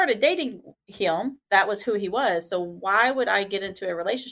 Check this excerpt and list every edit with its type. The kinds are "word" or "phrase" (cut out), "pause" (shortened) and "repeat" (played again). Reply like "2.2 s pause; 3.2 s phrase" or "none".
1.4 s pause